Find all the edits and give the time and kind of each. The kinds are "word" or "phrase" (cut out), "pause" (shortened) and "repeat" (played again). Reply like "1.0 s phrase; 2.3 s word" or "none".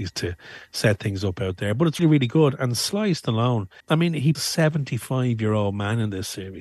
2.0 s word; 3.8 s pause; 4.3 s word